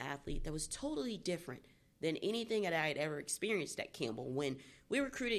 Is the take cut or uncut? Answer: uncut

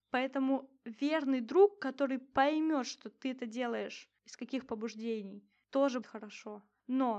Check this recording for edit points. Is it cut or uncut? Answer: cut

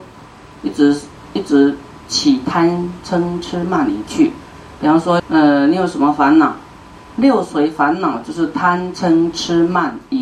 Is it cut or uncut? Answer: cut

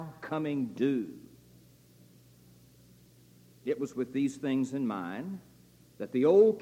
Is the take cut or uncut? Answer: uncut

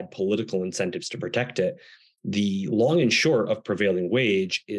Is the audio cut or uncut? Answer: uncut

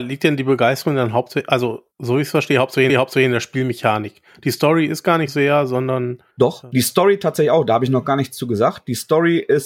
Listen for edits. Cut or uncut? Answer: cut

